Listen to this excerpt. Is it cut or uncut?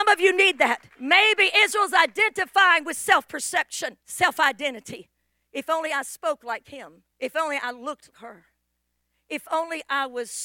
cut